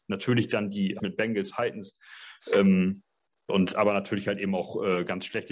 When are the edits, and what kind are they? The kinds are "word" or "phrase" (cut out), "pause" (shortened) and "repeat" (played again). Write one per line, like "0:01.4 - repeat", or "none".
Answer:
0:01.0 - word
0:01.5 - word
0:03.5 - word